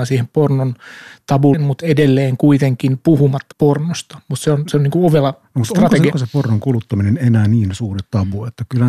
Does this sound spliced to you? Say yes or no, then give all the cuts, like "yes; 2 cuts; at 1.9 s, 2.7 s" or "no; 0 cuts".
yes; 3 cuts; at 1.5 s, 3.5 s, 6.1 s